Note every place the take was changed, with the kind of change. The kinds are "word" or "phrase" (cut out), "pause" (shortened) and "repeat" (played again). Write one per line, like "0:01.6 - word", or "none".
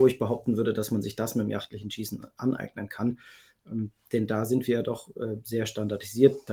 none